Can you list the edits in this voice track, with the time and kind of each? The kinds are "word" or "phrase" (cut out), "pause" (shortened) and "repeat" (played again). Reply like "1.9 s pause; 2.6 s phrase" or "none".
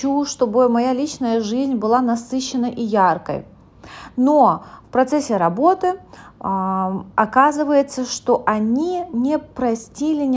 none

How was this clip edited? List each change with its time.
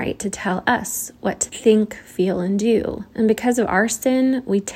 3.1 s pause

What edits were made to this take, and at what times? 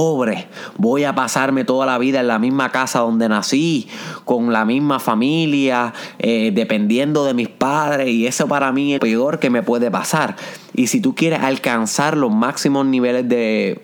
9.0 s word

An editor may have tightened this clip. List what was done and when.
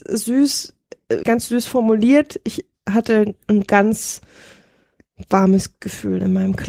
1.2 s word

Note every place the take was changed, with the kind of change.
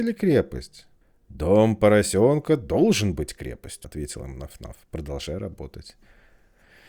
1.0 s pause; 3.8 s word

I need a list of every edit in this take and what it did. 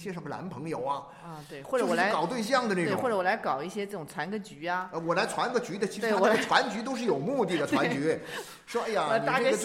none

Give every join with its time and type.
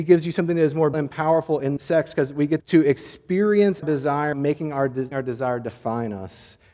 0.9 s word; 1.8 s word; 2.6 s word; 3.8 s word; 4.3 s word; 5.1 s word

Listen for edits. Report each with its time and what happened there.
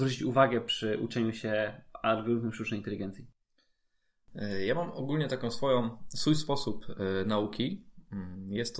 none

